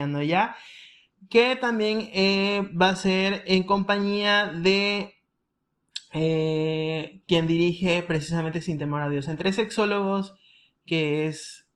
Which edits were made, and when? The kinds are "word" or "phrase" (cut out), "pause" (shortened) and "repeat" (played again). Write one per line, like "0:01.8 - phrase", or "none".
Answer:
none